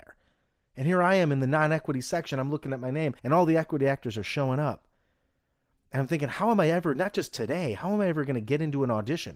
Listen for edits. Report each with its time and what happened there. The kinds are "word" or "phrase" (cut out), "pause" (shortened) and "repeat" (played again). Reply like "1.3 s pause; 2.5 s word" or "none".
3.2 s pause